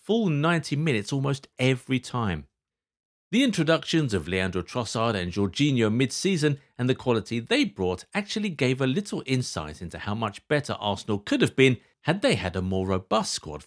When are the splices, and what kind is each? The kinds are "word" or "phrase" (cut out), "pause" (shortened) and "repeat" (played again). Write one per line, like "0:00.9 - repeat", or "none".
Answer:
none